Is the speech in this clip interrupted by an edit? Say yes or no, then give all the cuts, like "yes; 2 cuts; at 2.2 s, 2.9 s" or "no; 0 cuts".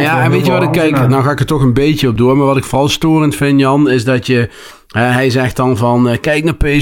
no; 0 cuts